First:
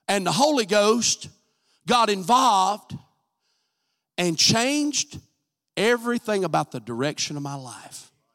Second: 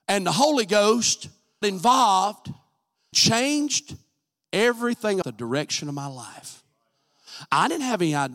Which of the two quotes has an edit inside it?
second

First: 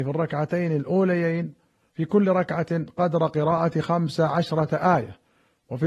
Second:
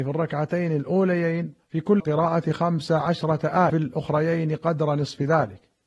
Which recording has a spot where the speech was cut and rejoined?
second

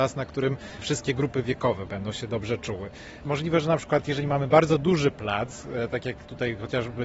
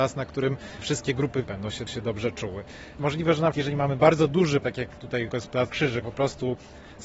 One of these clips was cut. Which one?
second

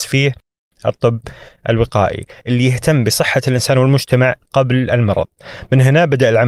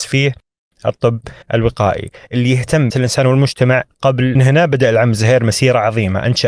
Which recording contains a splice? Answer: second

